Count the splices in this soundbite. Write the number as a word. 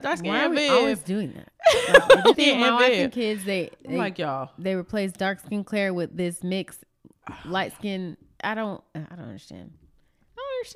one